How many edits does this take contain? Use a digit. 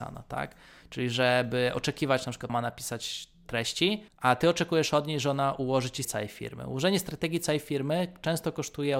3